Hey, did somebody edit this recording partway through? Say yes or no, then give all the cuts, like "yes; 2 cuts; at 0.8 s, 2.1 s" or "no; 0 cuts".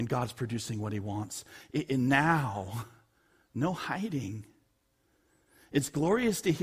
no; 0 cuts